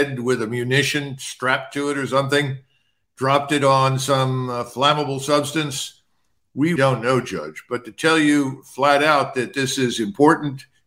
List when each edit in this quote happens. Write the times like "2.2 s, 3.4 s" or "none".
6.8 s